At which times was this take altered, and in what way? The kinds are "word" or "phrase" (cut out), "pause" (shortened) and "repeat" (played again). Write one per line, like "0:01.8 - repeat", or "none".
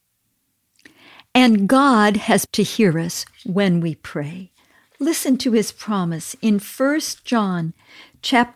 0:02.4 - word